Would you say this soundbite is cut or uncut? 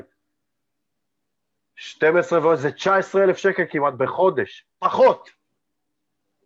cut